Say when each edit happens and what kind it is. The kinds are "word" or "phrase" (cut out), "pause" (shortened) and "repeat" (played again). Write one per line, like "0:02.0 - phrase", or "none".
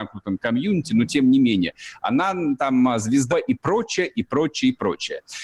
0:03.3 - word